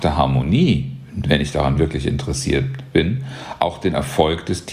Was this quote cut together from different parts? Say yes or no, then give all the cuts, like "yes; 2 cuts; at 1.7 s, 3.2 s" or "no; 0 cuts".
no; 0 cuts